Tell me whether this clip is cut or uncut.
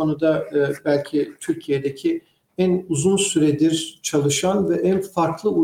uncut